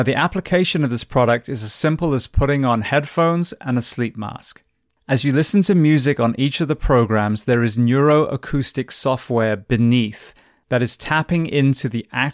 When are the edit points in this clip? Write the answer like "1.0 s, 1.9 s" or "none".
none